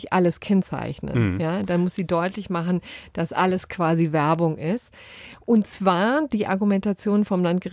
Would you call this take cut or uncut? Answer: uncut